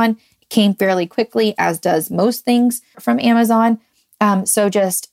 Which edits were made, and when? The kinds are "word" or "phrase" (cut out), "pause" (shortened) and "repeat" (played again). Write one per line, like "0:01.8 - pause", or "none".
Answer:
0:02.9 - word

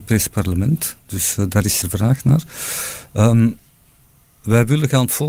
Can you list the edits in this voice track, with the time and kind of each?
0:01.8 - phrase

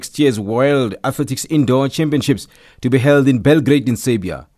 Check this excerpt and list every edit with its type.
none

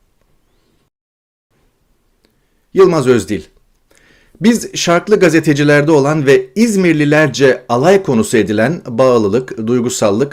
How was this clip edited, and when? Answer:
none

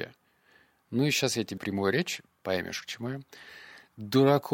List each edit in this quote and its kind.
0:01.6 - word

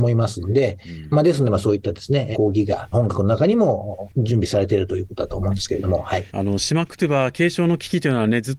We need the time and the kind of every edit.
0:02.3 - phrase
0:02.9 - word
0:06.3 - pause

